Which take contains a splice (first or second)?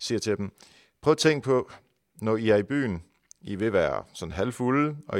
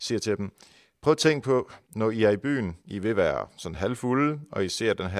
second